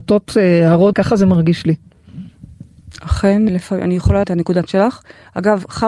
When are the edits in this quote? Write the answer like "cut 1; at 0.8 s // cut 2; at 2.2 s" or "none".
cut 1; at 0.9 s // cut 2; at 3.5 s // cut 3; at 4.2 s // cut 4; at 4.7 s